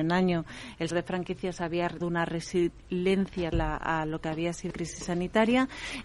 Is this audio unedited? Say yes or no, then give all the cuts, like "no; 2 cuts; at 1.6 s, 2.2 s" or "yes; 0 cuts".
no; 4 cuts; at 0.9 s, 2.0 s, 3.5 s, 4.7 s